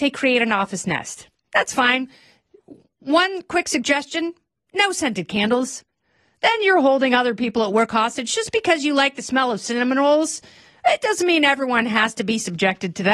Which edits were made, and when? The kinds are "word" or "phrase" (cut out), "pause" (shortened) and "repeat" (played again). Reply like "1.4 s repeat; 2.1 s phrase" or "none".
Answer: none